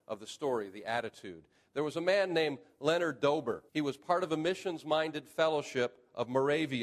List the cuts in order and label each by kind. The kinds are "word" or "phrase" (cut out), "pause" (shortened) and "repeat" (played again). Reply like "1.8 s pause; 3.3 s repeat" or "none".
3.7 s pause